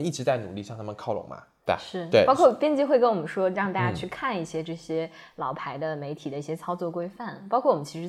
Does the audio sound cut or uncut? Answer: uncut